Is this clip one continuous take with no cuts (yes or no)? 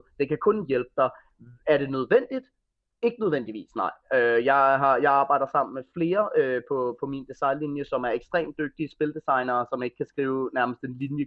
yes